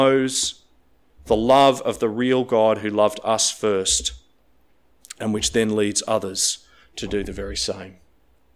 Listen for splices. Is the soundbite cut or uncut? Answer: uncut